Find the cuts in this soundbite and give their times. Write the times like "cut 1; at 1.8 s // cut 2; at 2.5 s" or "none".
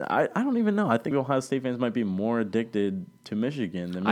cut 1; at 1.1 s